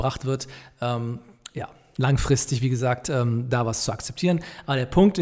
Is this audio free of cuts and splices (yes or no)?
yes